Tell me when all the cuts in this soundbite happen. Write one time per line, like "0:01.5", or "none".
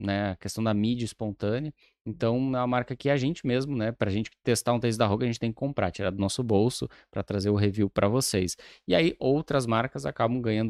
none